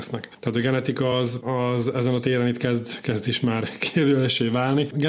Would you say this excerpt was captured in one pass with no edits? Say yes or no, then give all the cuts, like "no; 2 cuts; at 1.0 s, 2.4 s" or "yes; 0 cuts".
yes; 0 cuts